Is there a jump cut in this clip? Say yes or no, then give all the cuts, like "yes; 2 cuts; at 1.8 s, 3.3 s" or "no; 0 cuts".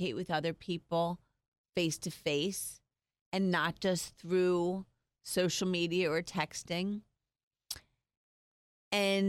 no; 0 cuts